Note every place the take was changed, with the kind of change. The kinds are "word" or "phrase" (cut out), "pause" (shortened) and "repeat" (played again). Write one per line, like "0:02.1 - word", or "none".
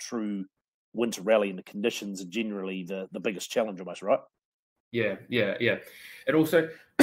none